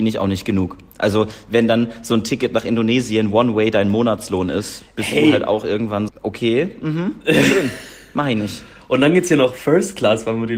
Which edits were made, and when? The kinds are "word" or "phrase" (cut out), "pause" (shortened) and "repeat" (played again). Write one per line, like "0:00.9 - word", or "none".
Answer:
0:06.1 - word